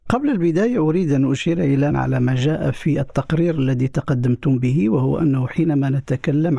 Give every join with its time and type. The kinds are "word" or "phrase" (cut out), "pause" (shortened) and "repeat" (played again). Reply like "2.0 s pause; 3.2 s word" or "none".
1.9 s phrase